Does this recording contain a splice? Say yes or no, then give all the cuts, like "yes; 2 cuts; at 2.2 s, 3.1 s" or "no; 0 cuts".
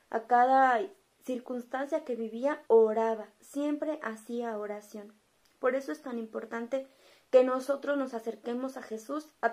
yes; 1 cut; at 2.7 s